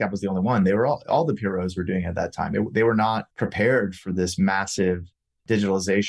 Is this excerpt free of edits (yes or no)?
no